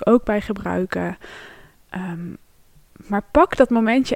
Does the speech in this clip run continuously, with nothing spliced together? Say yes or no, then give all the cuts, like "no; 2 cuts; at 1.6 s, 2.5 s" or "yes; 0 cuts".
yes; 0 cuts